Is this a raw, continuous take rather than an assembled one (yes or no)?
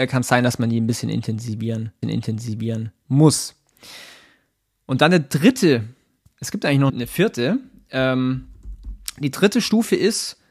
no